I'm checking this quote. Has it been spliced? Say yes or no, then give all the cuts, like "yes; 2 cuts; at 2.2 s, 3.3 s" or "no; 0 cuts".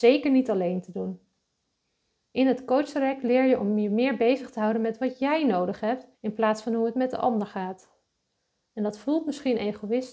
yes; 1 cut; at 6.1 s